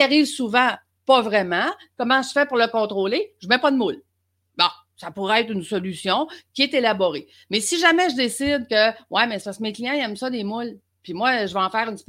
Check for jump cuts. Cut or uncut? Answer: uncut